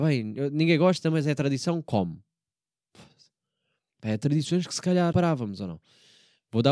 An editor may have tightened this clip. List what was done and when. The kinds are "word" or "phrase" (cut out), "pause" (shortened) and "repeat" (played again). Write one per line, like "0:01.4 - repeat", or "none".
0:05.1 - word